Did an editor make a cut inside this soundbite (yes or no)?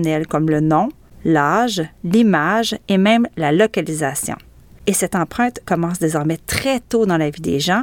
no